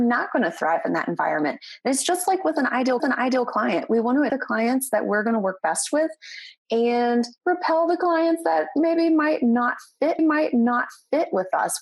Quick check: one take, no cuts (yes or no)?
no